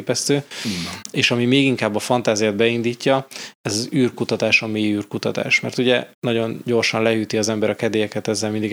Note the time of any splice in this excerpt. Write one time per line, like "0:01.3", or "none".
0:06.1